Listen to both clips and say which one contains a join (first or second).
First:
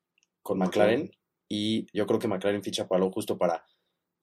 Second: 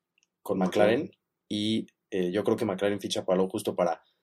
first